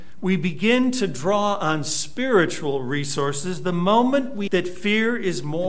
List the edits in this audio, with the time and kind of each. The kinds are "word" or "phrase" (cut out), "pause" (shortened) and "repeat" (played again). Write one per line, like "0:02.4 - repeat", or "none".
0:04.5 - word